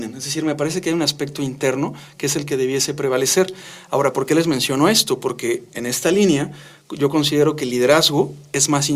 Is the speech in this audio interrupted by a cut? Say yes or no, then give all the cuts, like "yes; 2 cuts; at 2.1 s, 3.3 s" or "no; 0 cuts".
no; 0 cuts